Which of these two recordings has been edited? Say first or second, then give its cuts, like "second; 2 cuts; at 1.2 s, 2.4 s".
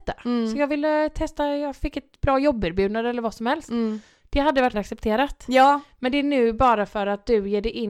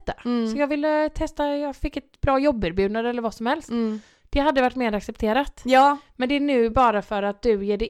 first; 1 cut; at 4.7 s